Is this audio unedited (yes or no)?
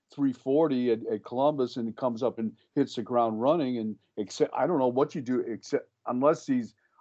no